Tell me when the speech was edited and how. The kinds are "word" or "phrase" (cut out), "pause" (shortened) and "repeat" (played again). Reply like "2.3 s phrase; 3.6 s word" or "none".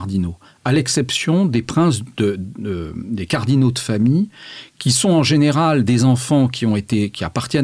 none